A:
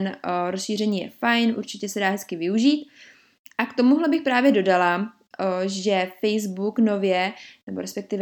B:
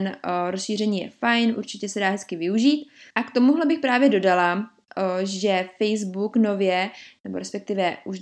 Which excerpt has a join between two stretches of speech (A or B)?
B